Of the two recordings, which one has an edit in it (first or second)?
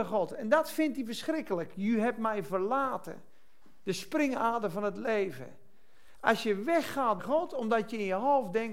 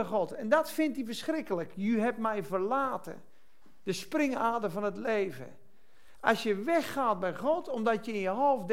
first